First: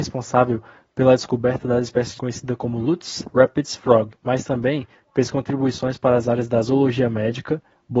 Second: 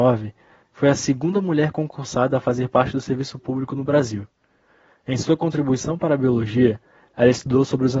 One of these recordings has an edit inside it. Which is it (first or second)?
first